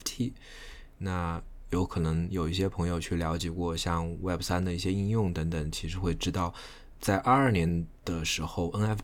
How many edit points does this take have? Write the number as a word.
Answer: one